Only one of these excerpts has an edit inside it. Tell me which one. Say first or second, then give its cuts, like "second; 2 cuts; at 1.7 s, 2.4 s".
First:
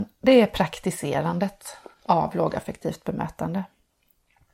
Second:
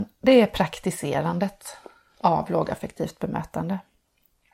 first; 1 cut; at 1.9 s